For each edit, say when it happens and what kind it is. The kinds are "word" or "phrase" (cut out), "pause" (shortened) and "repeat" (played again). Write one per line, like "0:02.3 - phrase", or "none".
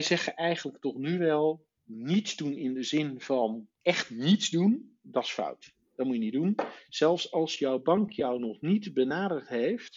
0:01.8 - pause
0:03.7 - pause